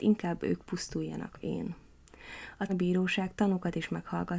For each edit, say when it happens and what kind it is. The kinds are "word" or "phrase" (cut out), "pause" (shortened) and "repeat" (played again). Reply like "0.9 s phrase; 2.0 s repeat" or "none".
1.4 s word; 2.7 s word